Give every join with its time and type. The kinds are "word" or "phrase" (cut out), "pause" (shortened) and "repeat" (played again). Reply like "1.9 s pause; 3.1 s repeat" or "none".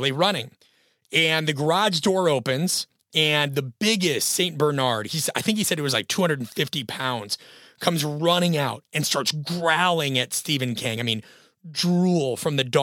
none